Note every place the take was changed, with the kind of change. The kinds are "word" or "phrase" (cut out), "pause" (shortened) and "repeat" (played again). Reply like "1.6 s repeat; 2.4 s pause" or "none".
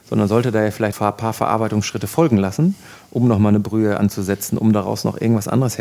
0.9 s phrase